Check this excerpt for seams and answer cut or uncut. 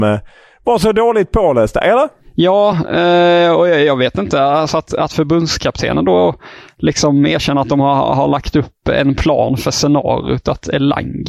uncut